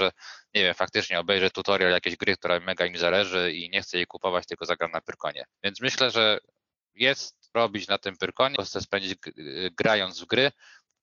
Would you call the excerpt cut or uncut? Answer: cut